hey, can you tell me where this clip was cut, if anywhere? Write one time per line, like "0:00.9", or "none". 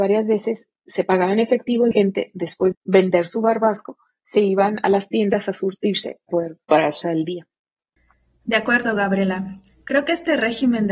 0:01.9
0:02.7
0:06.3
0:06.6
0:07.0